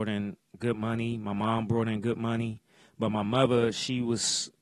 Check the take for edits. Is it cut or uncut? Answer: uncut